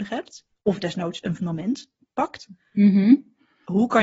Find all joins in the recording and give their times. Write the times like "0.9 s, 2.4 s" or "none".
1.4 s